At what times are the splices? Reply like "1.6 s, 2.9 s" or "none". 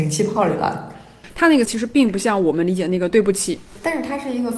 1.6 s